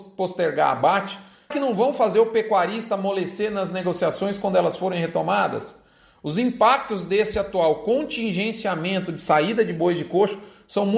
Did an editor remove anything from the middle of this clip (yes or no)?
yes